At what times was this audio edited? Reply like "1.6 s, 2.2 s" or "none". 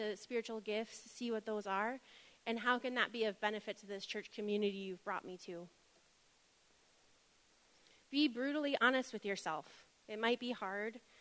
none